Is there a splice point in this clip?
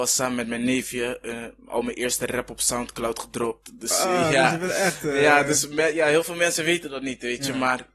no; 0 cuts

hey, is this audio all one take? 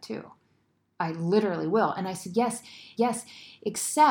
no; 1 cut; at 3.0 s

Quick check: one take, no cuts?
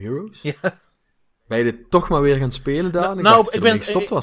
yes; 0 cuts

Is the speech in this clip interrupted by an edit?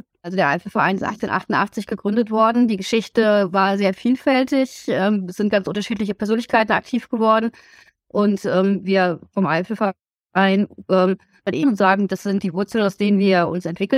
no; 0 cuts

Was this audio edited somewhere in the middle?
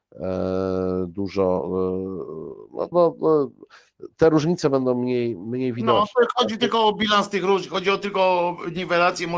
yes; 1 cut; at 2.9 s

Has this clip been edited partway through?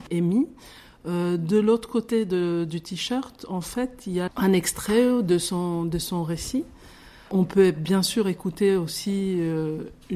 yes; 1 cut; at 4.3 s

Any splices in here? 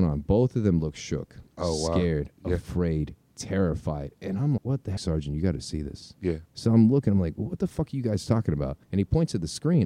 yes; 6 cuts; at 1.5 s, 3.2 s, 4.6 s, 5.0 s, 6.5 s, 8.8 s

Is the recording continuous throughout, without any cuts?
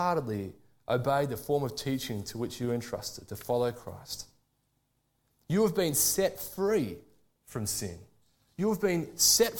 yes; 0 cuts

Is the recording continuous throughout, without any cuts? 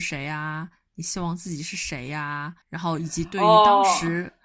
no; 1 cut; at 2.6 s

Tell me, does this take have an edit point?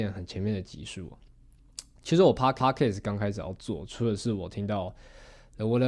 yes; 1 cut; at 2.6 s

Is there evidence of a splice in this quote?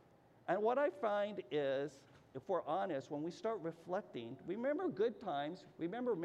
no; 0 cuts

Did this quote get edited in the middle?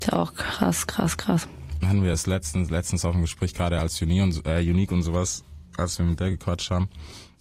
no; 0 cuts

